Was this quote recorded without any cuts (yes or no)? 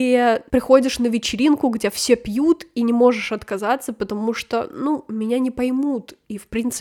yes